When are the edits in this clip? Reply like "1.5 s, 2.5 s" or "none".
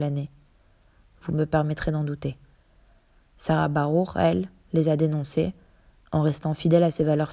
none

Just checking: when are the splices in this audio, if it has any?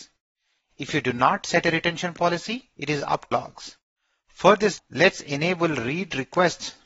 2.7 s, 3.3 s, 4.8 s

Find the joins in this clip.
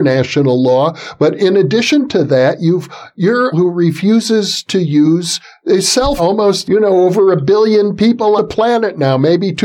3.5 s, 6.2 s, 6.6 s, 8.4 s

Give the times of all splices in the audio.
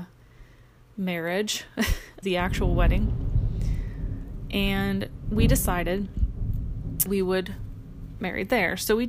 2.2 s, 7.1 s, 8.2 s

